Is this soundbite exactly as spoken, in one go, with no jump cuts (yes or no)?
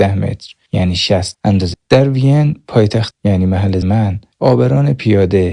no